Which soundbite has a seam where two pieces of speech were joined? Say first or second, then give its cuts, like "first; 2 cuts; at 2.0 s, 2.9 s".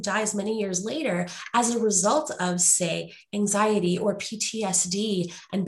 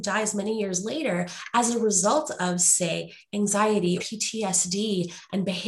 second; 1 cut; at 4.0 s